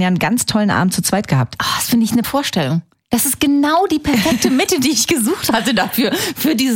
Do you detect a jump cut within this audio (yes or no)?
yes